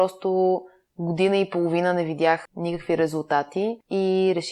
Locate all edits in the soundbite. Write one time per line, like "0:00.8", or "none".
none